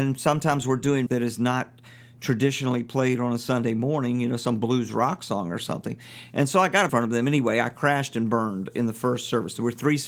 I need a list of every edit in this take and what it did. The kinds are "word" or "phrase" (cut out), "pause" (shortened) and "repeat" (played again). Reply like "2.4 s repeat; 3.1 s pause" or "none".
1.1 s word; 6.9 s word